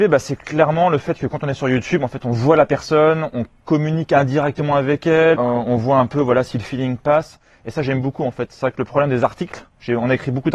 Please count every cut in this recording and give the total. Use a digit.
1